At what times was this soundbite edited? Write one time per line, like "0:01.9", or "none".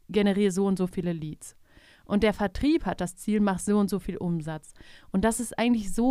none